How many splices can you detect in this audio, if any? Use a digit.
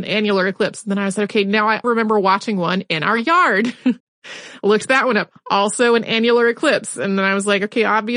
2